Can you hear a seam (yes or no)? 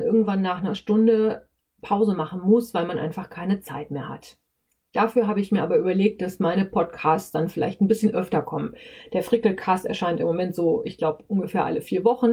no